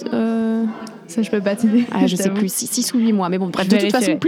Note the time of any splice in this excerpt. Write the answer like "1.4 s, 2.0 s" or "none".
none